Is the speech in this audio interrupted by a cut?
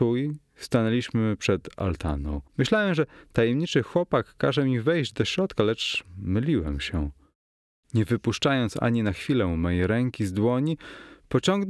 yes; 1 cut; at 2.5 s

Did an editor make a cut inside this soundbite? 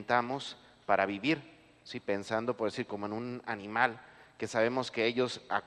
no; 0 cuts

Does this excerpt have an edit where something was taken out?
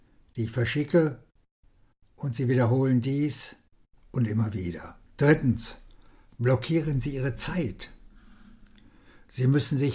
yes; 2 cuts; at 4.0 s, 5.0 s

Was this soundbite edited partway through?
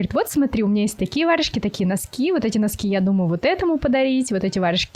no; 0 cuts

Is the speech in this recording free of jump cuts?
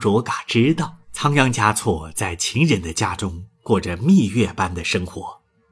no; 1 cut; at 1.0 s

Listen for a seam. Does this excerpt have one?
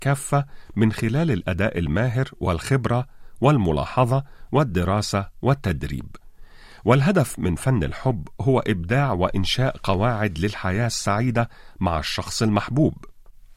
no; 0 cuts

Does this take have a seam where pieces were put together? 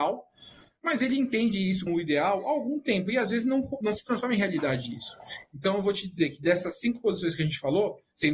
yes; 2 cuts; at 1.9 s, 3.8 s

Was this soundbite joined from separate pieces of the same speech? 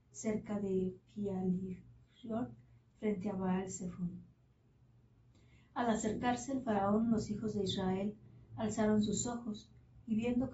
no; 0 cuts

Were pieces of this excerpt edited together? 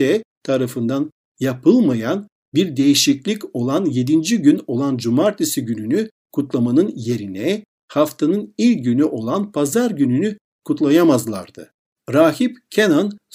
no; 0 cuts

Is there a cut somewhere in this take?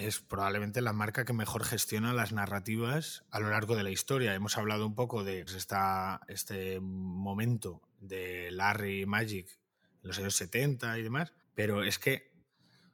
yes; 2 cuts; at 5.5 s, 11.4 s

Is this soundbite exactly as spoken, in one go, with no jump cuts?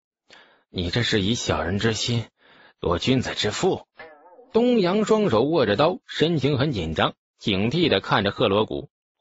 yes; 0 cuts

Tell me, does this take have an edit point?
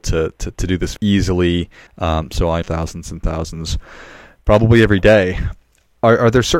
yes; 3 cuts; at 1.0 s, 1.9 s, 2.6 s

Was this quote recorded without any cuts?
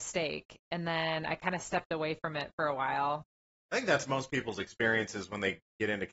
yes; 0 cuts

